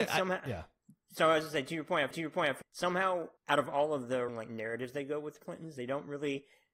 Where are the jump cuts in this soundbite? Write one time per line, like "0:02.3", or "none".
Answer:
0:02.1
0:02.6
0:03.4
0:04.3
0:05.4